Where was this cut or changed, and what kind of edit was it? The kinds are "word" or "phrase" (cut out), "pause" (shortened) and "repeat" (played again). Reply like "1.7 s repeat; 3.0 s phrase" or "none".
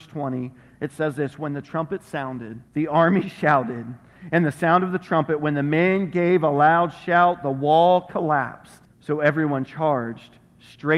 2.7 s pause; 8.8 s pause